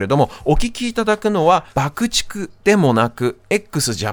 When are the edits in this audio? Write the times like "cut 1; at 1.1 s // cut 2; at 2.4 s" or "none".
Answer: cut 1; at 1.7 s